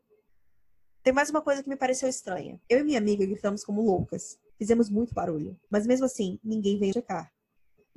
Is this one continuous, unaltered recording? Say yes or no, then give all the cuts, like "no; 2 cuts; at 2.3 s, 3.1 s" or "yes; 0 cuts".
no; 3 cuts; at 2.6 s, 5.6 s, 6.9 s